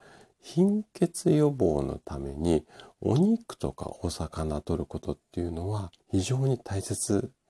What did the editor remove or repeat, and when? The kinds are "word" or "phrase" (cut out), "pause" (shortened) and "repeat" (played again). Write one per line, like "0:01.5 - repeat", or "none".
0:06.0 - pause